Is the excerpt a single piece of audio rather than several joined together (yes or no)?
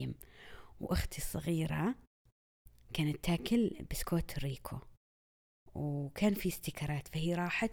yes